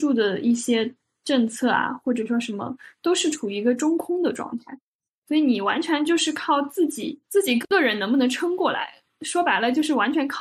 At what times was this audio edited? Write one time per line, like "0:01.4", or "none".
none